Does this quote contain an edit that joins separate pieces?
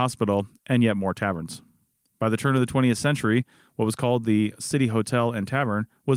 no; 0 cuts

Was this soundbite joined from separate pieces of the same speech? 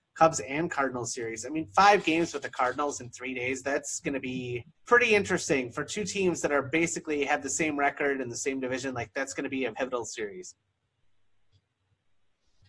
yes; 2 cuts; at 4.7 s, 9.7 s

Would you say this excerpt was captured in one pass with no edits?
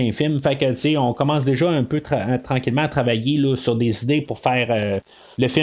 yes; 0 cuts

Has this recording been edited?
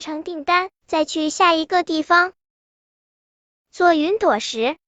no; 0 cuts

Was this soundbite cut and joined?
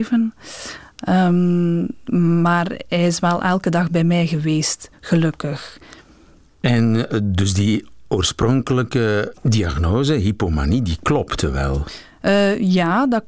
no; 0 cuts

